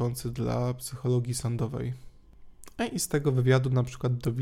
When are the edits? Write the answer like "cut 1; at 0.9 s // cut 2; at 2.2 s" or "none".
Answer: none